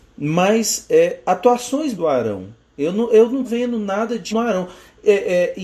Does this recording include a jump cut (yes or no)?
yes